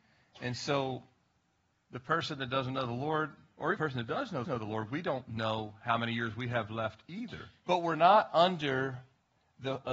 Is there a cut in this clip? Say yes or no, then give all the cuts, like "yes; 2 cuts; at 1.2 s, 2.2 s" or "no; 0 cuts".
yes; 3 cuts; at 3.8 s, 4.4 s, 7.6 s